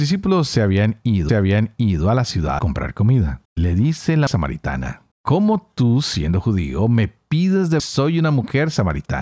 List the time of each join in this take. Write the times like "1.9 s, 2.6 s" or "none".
1.3 s, 2.6 s, 3.4 s, 4.3 s, 5.1 s, 7.8 s

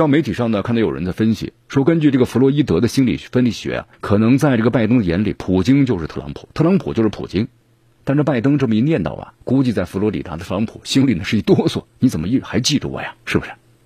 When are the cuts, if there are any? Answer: 3.9 s, 9.4 s, 11.9 s

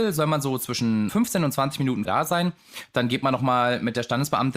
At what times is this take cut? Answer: 1.1 s, 2.0 s

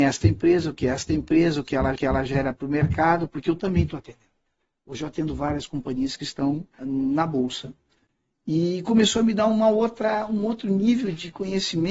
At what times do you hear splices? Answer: 2.0 s, 6.8 s

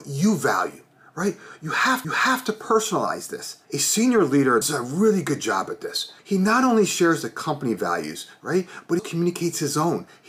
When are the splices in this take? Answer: 2.0 s, 3.6 s, 4.6 s, 6.2 s, 9.0 s

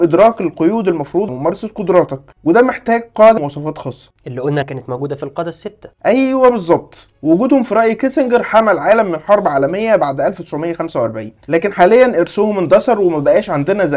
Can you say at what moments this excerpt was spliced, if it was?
1.3 s, 3.4 s, 4.6 s

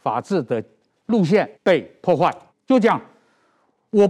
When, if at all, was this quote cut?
1.5 s, 2.5 s

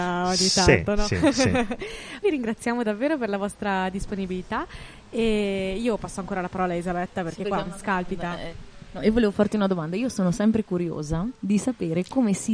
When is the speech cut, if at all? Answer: 2.2 s, 11.3 s

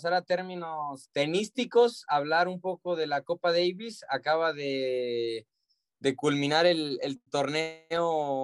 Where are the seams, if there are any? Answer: none

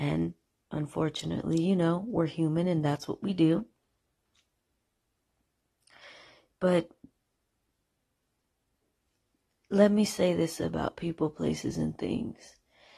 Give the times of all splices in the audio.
none

